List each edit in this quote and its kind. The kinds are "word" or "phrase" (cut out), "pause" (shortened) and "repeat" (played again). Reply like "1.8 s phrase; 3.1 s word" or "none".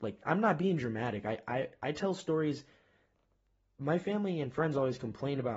none